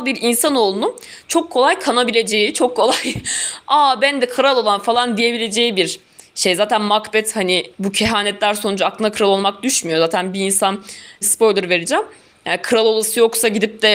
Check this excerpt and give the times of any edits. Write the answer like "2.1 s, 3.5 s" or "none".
7.7 s, 11.2 s